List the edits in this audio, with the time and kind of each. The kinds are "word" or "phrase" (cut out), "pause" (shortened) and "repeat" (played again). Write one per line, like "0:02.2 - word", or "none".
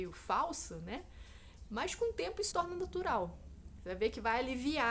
0:02.5 - word